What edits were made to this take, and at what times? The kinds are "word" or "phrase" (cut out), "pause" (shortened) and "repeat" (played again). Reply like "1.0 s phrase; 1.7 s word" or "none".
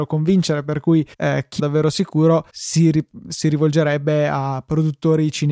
1.1 s pause; 1.6 s phrase; 2.5 s pause